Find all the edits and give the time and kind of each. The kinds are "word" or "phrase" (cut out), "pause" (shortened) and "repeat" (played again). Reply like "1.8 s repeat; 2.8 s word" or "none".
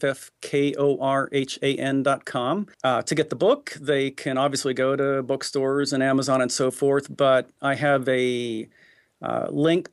2.7 s pause